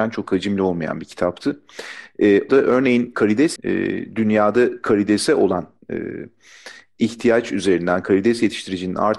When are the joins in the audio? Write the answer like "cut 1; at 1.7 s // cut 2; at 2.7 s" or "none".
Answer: cut 1; at 2.5 s // cut 2; at 3.1 s // cut 3; at 3.6 s